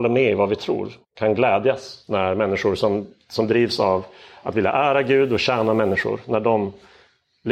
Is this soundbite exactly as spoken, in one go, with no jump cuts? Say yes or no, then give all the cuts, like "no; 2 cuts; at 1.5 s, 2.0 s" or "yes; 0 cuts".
no; 1 cut; at 1.0 s